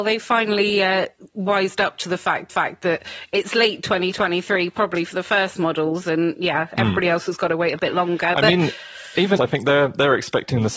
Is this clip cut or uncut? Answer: cut